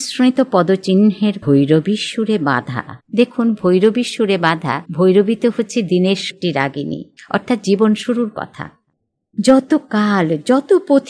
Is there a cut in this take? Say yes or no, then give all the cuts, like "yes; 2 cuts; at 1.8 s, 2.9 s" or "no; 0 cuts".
yes; 5 cuts; at 1.4 s, 3.0 s, 4.9 s, 6.3 s, 7.2 s